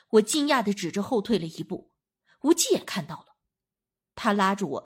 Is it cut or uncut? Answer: uncut